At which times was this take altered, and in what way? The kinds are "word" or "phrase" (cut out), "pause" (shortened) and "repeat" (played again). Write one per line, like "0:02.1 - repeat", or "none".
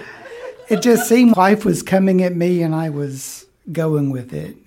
0:01.3 - word